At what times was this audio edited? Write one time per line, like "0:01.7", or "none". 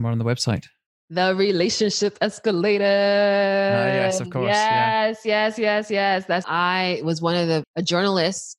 0:06.4

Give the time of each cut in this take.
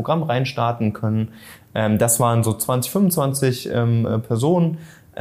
none

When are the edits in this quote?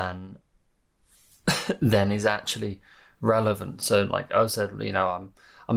none

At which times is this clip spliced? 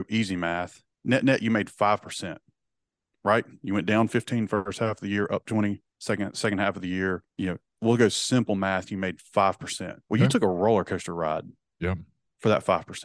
0:00.9
0:05.9
0:07.3
0:10.0

